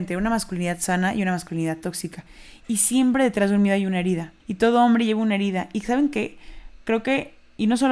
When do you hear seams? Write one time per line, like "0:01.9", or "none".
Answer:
0:04.4